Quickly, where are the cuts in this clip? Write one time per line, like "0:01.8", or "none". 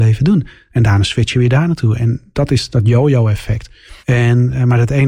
0:04.0